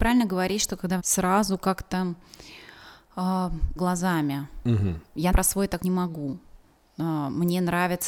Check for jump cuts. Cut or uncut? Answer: cut